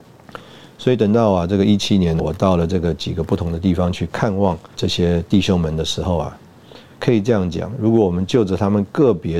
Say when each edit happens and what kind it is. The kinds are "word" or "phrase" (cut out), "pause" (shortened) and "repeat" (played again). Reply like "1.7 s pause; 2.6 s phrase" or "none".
2.2 s word; 4.7 s word; 7.0 s word